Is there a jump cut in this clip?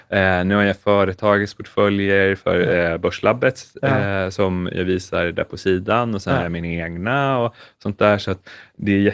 no; 0 cuts

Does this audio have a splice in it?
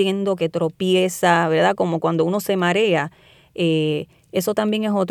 no; 0 cuts

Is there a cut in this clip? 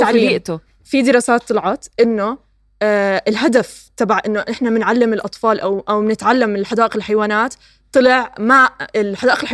no; 0 cuts

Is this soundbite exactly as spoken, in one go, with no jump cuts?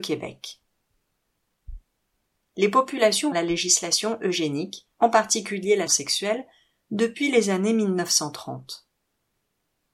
no; 3 cuts; at 3.3 s, 4.9 s, 5.9 s

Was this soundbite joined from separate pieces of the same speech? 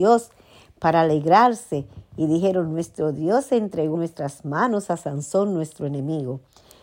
yes; 1 cut; at 4.0 s

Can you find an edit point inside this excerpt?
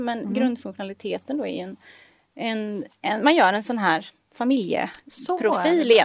no; 0 cuts

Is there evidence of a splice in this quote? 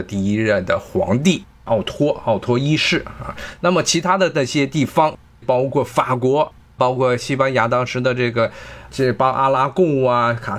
no; 0 cuts

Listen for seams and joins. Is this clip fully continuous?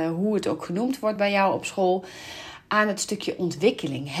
yes; 0 cuts

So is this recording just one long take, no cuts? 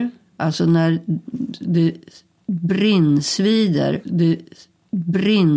no; 1 cut; at 4.0 s

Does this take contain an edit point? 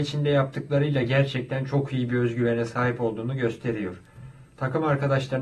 no; 0 cuts

